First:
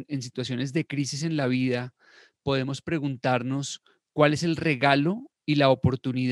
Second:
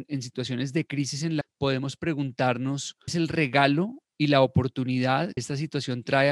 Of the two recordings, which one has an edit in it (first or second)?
second